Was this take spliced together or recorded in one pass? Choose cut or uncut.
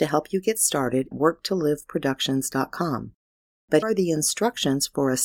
cut